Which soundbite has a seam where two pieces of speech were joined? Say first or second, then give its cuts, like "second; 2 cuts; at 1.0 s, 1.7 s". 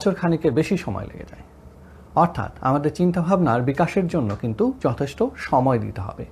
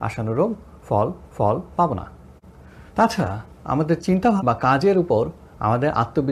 second; 3 cuts; at 1.3 s, 2.9 s, 4.4 s